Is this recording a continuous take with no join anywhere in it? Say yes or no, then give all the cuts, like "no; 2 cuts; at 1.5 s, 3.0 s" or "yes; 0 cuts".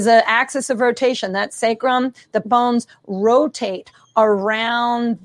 no; 1 cut; at 2.4 s